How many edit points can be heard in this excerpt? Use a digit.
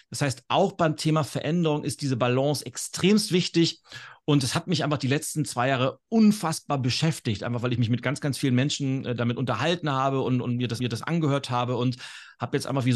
1